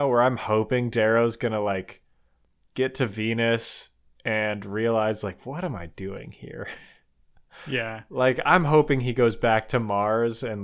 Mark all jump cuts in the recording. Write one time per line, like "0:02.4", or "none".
none